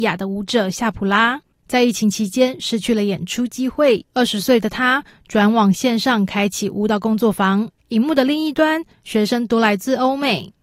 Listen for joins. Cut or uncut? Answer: cut